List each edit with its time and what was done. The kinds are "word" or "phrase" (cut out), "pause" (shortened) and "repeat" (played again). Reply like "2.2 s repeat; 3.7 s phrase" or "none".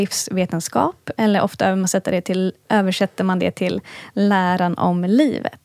none